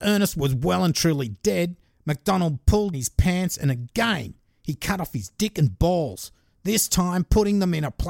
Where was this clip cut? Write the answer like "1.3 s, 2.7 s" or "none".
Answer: 2.9 s